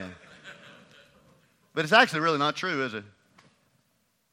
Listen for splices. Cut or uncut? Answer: uncut